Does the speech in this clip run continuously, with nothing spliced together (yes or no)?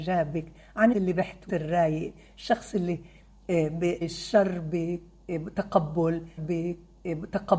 no